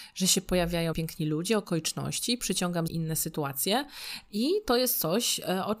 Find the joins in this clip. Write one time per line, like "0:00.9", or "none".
0:00.9
0:02.9